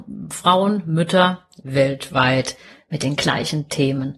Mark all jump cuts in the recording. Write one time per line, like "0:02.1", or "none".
none